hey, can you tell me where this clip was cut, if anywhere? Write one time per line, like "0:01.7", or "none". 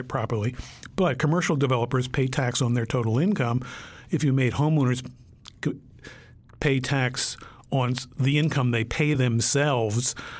none